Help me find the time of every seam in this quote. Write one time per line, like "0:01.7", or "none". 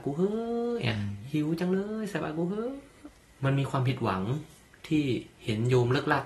none